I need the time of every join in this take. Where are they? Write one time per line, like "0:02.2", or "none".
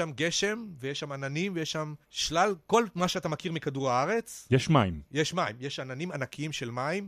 0:02.0
0:05.1

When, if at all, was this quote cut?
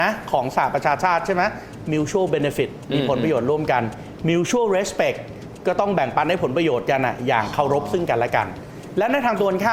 none

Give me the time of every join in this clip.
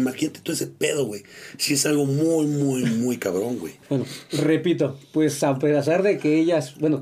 0:03.8

